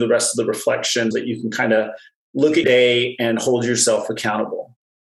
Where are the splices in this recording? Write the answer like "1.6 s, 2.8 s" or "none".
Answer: 1.1 s, 2.6 s